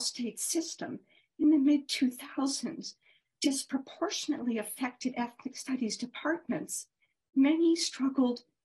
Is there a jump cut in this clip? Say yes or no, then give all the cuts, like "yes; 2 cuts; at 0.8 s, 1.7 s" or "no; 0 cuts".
no; 0 cuts